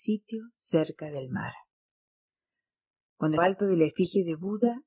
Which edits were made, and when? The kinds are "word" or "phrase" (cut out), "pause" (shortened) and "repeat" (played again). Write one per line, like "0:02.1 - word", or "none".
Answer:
0:03.4 - phrase